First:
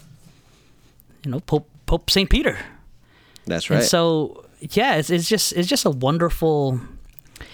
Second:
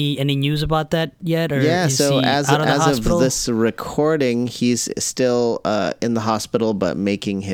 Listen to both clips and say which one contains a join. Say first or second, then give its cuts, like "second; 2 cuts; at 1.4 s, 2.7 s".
first; 1 cut; at 1.8 s